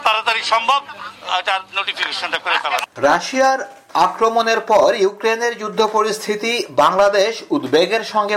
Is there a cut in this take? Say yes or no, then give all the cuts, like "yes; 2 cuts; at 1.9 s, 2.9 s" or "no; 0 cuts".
no; 0 cuts